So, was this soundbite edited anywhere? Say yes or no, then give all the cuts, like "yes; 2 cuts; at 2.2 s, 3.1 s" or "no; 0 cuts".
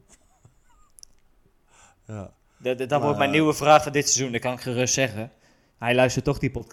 no; 0 cuts